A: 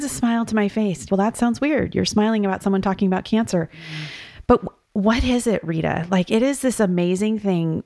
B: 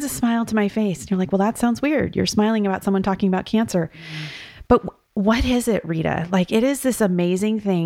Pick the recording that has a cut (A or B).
A